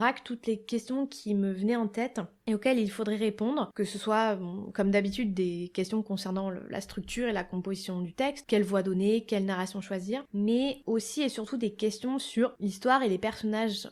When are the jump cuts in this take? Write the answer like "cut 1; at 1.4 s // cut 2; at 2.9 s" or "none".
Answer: none